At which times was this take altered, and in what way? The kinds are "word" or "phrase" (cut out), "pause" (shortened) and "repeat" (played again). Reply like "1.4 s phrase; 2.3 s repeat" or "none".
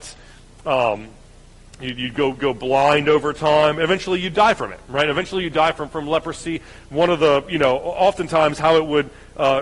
none